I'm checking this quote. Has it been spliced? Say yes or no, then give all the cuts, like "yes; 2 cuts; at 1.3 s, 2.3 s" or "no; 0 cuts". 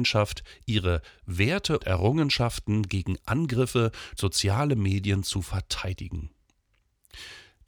yes; 2 cuts; at 1.8 s, 4.2 s